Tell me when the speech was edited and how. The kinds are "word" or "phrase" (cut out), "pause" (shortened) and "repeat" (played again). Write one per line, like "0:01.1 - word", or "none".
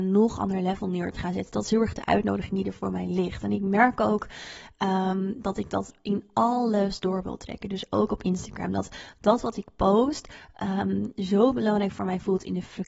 none